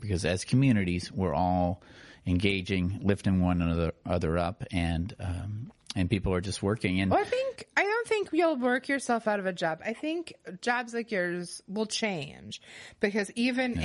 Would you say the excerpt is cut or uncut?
uncut